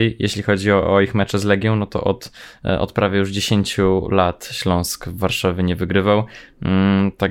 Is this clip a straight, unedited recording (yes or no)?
yes